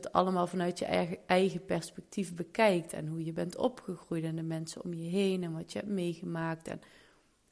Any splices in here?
no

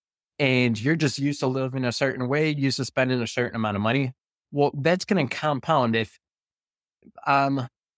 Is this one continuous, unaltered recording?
yes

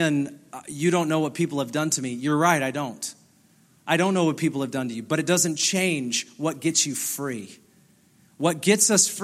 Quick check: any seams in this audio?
no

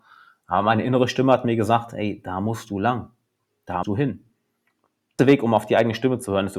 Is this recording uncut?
no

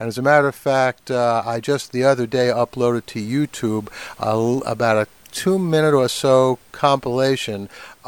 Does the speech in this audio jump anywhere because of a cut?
no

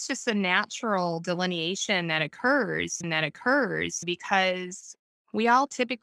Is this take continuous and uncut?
no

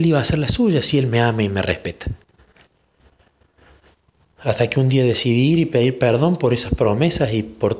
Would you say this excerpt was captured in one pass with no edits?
yes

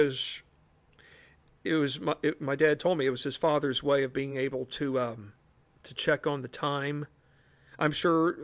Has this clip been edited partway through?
no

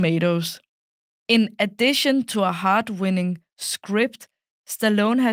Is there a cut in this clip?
no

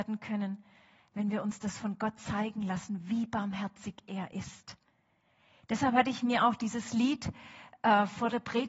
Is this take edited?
no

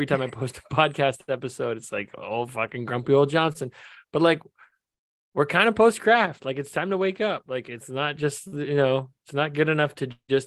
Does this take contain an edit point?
no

